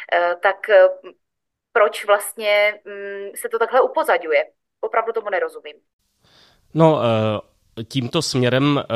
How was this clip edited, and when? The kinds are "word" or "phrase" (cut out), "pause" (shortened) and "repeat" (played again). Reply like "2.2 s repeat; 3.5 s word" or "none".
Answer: none